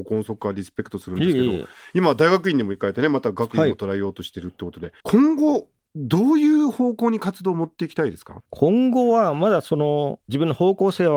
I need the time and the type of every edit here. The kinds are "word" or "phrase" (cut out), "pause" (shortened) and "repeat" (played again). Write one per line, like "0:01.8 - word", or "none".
0:05.0 - pause
0:08.5 - pause